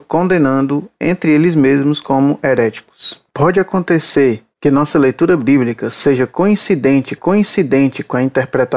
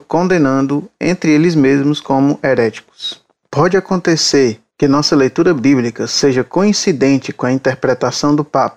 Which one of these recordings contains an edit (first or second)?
first